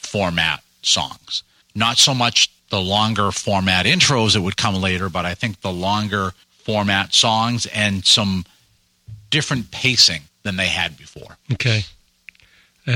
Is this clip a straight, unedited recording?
no; 5 cuts; at 1.6 s, 2.6 s, 6.4 s, 10.3 s, 11.4 s

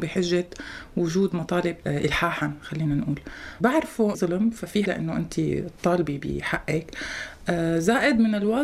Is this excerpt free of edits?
no; 4 cuts; at 1.8 s, 3.6 s, 4.1 s, 4.9 s

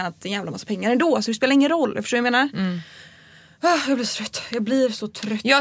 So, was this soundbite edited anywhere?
no; 0 cuts

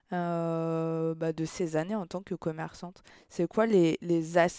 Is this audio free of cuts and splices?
yes; 0 cuts

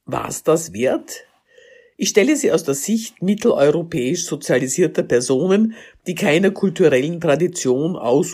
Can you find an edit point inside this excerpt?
no; 0 cuts

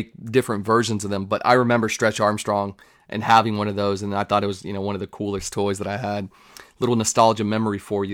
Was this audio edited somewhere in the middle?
no; 0 cuts

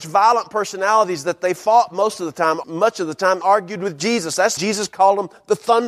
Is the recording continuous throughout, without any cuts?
no; 3 cuts; at 2.6 s, 3.4 s, 4.6 s

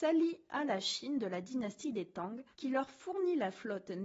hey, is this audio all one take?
no; 1 cut; at 2.5 s

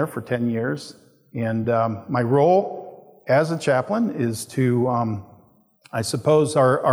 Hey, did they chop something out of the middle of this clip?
no; 0 cuts

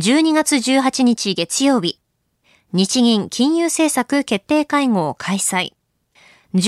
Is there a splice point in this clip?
no; 0 cuts

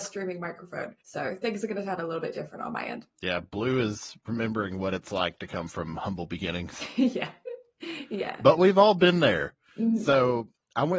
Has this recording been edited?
yes; 2 cuts; at 1.0 s, 3.1 s

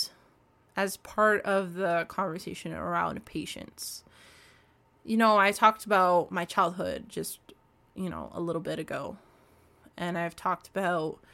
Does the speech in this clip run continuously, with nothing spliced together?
yes; 0 cuts

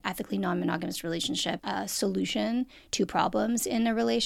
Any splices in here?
yes; 1 cut; at 1.6 s

